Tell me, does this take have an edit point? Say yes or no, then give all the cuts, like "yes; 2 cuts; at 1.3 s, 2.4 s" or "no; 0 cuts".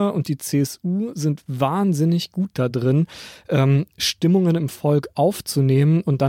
no; 0 cuts